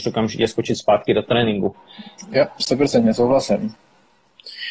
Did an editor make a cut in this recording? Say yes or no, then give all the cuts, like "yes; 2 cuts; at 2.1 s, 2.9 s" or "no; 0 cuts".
no; 0 cuts